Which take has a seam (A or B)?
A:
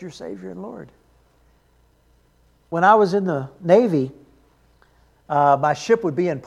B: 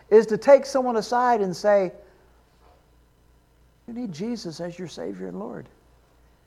B